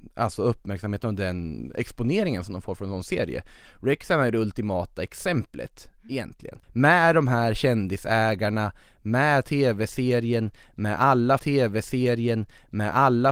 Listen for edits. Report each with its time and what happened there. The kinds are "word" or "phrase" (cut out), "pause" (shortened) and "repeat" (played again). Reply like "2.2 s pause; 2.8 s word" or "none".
6.6 s pause; 11.4 s repeat